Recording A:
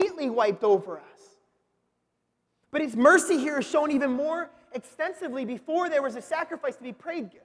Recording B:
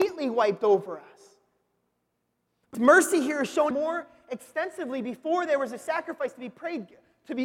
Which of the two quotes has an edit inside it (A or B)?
B